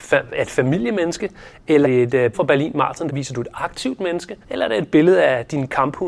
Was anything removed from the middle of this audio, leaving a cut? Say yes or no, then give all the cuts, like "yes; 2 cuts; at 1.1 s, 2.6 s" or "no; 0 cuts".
yes; 4 cuts; at 1.8 s, 2.3 s, 3.1 s, 4.4 s